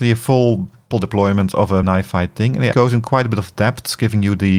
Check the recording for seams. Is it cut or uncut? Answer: cut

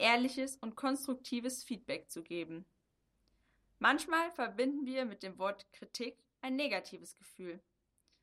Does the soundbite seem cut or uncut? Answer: uncut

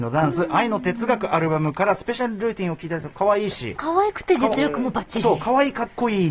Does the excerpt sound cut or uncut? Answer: cut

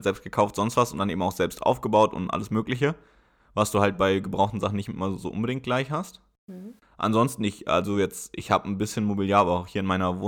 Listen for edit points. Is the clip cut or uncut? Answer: uncut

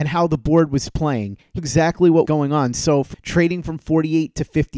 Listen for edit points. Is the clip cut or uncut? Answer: cut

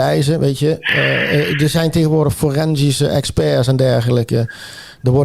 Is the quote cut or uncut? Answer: uncut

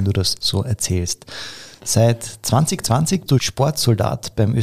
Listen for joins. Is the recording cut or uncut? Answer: cut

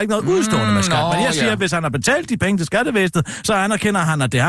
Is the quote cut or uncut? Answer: uncut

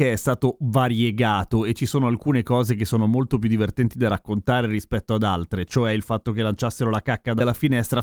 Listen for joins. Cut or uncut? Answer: uncut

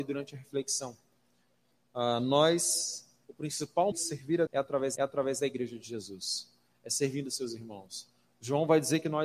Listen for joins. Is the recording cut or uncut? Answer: cut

